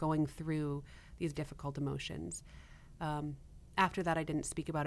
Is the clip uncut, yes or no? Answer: no